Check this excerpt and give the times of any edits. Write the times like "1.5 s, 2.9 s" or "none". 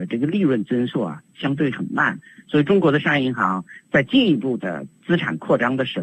4.9 s